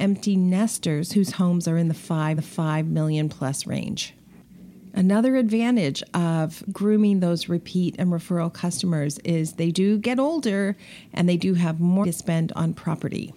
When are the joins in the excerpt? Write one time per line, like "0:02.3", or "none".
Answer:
0:02.4
0:06.7
0:12.0